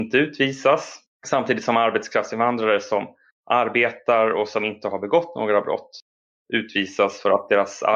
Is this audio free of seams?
yes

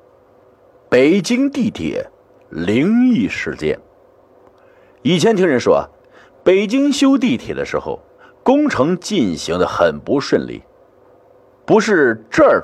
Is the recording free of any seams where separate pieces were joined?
yes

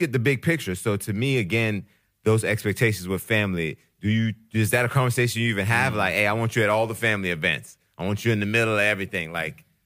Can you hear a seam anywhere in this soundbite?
no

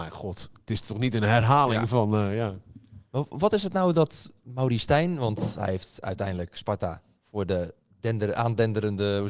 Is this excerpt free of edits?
yes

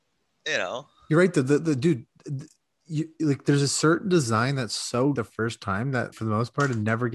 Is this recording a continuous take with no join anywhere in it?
no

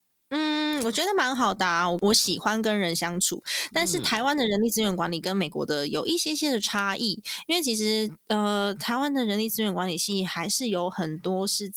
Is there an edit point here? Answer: no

